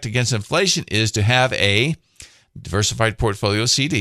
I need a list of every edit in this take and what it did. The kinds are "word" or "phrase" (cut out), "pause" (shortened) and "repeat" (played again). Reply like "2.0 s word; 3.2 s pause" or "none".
none